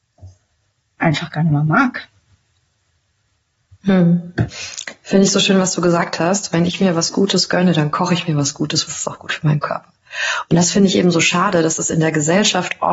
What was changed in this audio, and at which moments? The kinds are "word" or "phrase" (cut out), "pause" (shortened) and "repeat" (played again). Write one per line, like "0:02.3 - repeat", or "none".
0:08.9 - phrase